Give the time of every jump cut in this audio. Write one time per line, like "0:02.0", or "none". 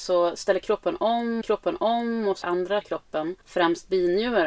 0:01.4
0:02.4
0:02.8
0:03.4

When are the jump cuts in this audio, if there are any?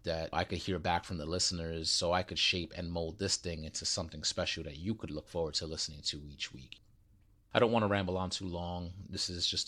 none

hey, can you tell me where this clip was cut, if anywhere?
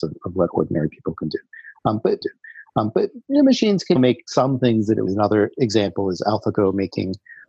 0:02.2
0:04.0
0:05.1

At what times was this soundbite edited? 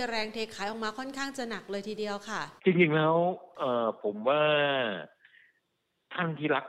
0:02.6

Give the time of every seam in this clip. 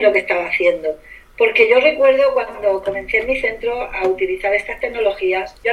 none

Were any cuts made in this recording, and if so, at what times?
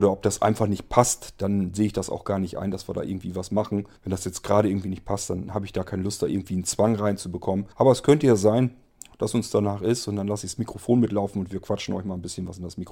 0:04.0
0:07.7

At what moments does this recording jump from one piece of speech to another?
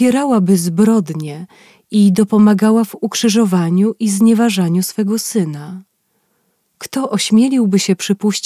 none

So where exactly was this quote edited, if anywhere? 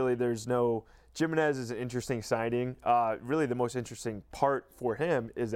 none

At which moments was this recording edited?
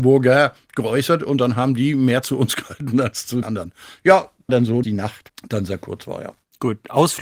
0:03.4
0:04.5
0:04.8

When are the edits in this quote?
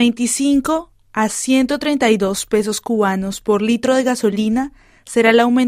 none

